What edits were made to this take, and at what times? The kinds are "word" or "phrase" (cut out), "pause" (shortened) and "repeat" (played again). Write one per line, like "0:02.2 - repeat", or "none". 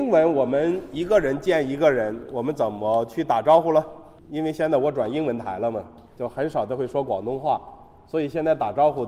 0:04.2 - pause
0:06.1 - pause